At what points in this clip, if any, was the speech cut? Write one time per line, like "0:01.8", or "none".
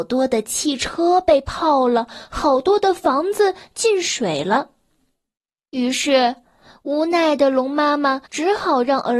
0:08.3